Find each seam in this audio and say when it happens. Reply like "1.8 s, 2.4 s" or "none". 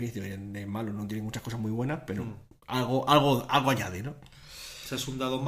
none